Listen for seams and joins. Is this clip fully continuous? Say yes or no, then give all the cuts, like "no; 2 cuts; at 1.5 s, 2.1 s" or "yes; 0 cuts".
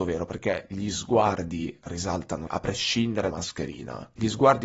no; 2 cuts; at 2.5 s, 3.3 s